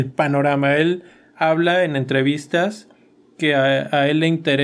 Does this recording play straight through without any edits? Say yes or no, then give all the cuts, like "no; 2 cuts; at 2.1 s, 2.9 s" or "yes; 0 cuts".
yes; 0 cuts